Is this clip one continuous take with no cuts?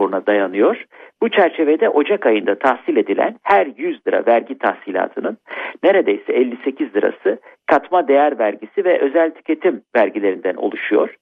yes; 0 cuts

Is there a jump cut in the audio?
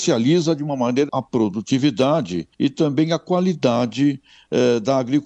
yes; 2 cuts; at 1.1 s, 2.5 s

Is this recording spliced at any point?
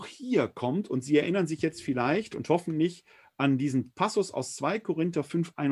no; 0 cuts

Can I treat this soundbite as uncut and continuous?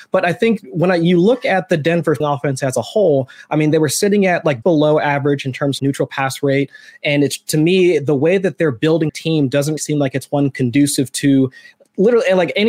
no; 5 cuts; at 2.2 s, 4.6 s, 5.8 s, 9.1 s, 9.8 s

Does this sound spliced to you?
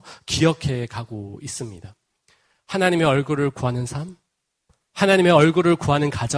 no; 0 cuts

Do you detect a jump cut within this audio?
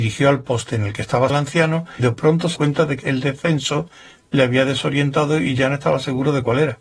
yes; 4 cuts; at 1.3 s, 2.0 s, 2.6 s, 3.0 s

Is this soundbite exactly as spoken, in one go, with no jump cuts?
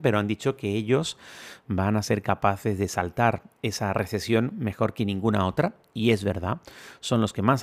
yes; 0 cuts

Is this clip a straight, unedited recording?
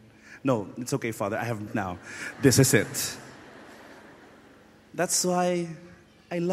no; 1 cut; at 1.7 s

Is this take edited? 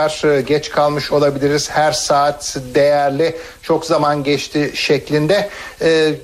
no; 0 cuts

